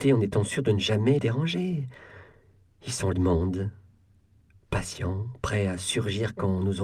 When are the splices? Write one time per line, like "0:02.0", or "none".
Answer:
0:01.2
0:03.1

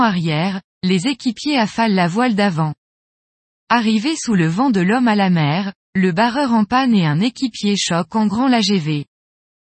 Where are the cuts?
none

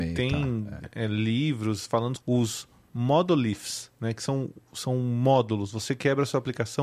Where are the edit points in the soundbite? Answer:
0:02.2

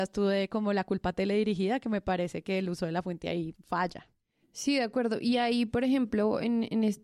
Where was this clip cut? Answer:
0:03.5

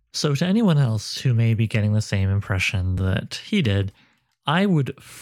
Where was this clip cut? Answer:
none

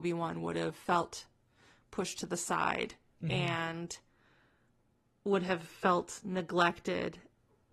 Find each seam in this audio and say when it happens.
none

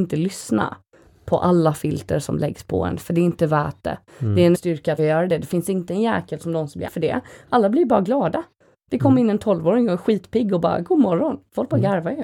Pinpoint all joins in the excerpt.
0:04.5
0:05.0
0:06.9

